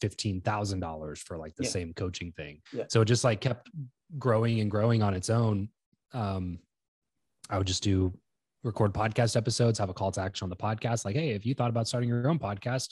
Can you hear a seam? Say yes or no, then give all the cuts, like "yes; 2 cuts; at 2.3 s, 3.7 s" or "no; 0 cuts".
yes; 1 cut; at 2.7 s